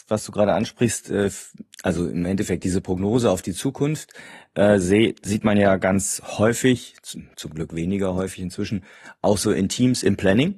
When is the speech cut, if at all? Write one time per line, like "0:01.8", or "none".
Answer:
0:01.7